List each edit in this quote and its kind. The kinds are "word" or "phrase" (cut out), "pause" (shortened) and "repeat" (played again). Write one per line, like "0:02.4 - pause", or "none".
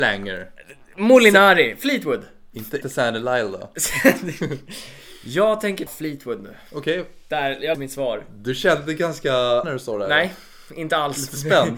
0:02.8 - word
0:05.9 - word
0:07.7 - word
0:09.6 - word